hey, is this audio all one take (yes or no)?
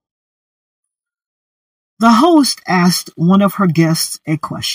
yes